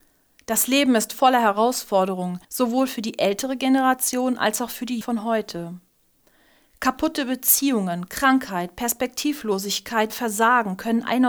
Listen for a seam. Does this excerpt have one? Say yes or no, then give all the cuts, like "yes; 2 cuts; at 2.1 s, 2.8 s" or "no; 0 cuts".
yes; 3 cuts; at 2.4 s, 5.0 s, 10.1 s